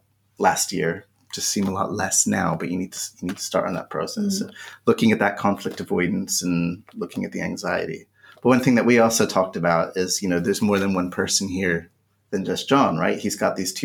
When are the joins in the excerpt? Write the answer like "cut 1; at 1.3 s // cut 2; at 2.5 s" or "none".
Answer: none